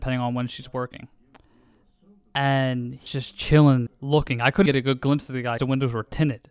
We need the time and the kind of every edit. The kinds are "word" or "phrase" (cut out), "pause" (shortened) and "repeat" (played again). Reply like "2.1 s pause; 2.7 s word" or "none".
3.1 s word; 3.9 s word; 4.7 s word; 5.6 s word